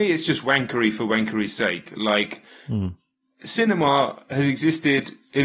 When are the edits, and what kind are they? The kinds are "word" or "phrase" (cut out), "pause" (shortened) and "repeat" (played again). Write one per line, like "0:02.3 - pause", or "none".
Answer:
none